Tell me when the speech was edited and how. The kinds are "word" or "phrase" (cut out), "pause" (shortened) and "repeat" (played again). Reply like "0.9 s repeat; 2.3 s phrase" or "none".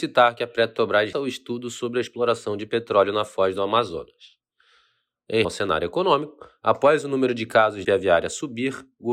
1.1 s word; 5.4 s word; 7.8 s phrase